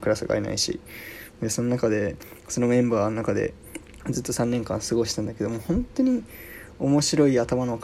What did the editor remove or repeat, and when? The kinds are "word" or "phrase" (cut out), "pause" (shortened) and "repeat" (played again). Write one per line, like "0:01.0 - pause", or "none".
0:04.0 - pause